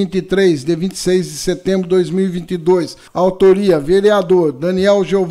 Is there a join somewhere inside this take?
yes; 1 cut; at 3.1 s

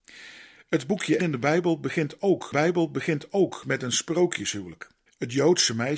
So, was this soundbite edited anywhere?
yes; 3 cuts; at 1.2 s, 2.5 s, 5.1 s

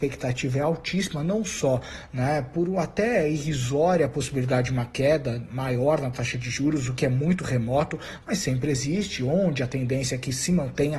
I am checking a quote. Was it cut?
no; 0 cuts

